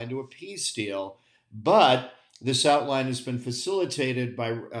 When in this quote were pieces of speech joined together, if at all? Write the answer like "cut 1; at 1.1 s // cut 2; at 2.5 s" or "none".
none